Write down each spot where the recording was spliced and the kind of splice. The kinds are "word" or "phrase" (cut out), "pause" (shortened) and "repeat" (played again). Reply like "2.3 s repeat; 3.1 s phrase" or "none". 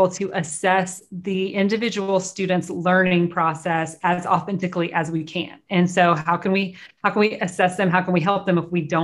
none

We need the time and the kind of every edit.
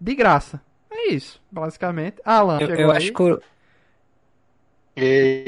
2.6 s word

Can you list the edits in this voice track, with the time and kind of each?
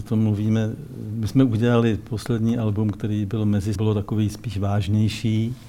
3.7 s phrase

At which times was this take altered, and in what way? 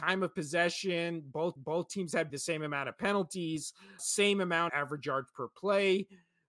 1.6 s repeat; 2.3 s word; 4.0 s word; 4.7 s word

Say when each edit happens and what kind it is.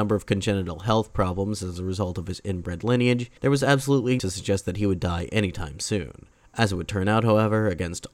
3.4 s pause; 4.2 s word; 6.3 s pause

